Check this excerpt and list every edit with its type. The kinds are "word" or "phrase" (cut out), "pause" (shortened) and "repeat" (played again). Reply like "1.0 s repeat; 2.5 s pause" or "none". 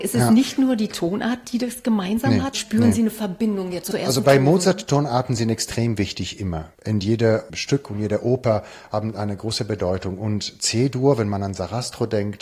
2.5 s word; 3.8 s word; 4.2 s word